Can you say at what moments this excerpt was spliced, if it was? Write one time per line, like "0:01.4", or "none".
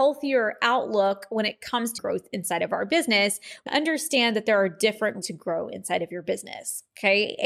0:02.0
0:03.7
0:05.2

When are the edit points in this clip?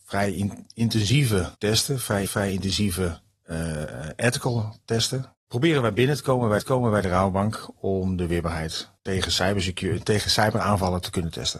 0:01.5
0:02.3
0:06.6
0:09.0

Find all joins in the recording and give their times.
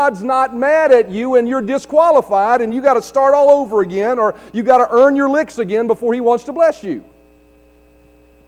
none

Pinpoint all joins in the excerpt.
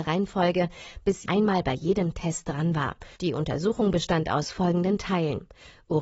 0:01.3
0:03.1

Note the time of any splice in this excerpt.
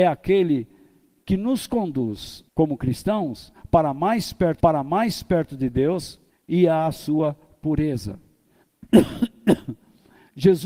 0:02.5
0:04.6
0:06.3

